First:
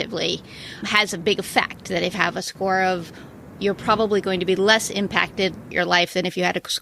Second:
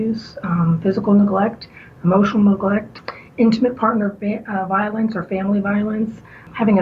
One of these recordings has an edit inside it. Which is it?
first; 3 cuts; at 2.1 s, 3.5 s, 5.7 s

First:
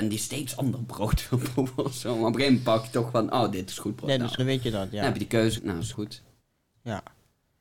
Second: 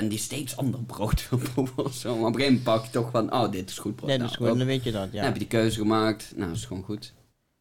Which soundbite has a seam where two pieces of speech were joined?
first; 3 cuts; at 4.4 s, 5.6 s, 5.9 s

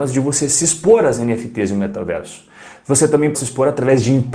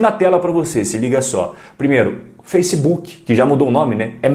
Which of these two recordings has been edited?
first; 1 cut; at 3.3 s

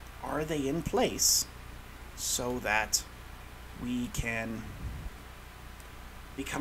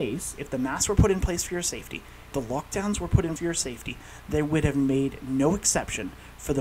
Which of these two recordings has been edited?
second; 2 cuts; at 2.3 s, 3.4 s

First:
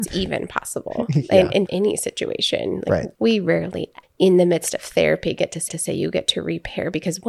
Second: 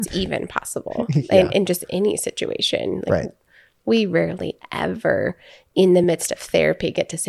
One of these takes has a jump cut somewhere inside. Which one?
first; 4 cuts; at 1.7 s, 3.1 s, 4.0 s, 5.7 s

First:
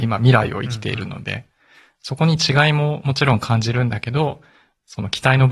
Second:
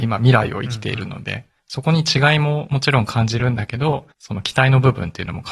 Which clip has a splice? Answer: second; 2 cuts; at 1.6 s, 4.1 s

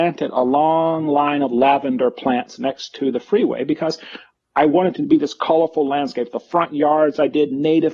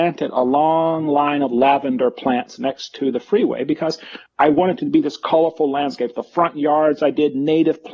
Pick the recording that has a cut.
second; 1 cut; at 4.3 s

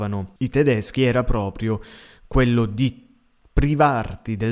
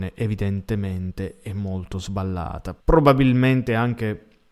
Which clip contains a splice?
second; 1 cut; at 2.8 s

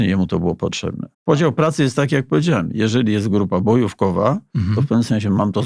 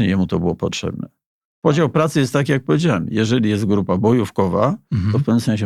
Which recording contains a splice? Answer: first; 1 cut; at 1.1 s

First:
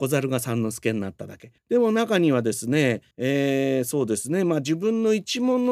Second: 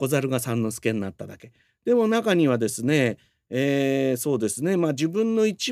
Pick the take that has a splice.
first; 2 cuts; at 1.6 s, 3.1 s

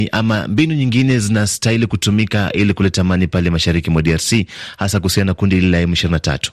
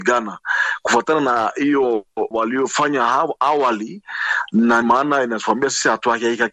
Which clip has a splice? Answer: second; 2 cuts; at 2.3 s, 4.8 s

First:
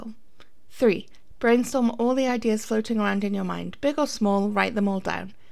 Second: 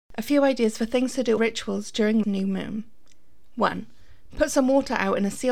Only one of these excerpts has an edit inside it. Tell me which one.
second; 2 cuts; at 1.4 s, 2.2 s

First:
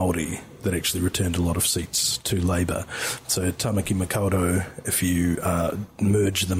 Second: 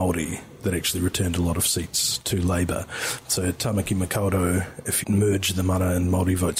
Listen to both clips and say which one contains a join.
second; 1 cut; at 5.0 s

